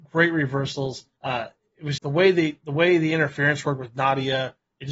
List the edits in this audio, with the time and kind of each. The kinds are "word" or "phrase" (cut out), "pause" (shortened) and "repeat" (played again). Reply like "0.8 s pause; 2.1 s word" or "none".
1.1 s pause; 2.0 s word